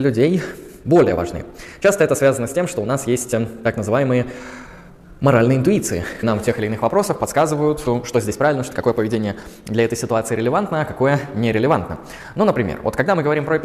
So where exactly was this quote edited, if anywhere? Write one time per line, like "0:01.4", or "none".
0:06.2
0:08.7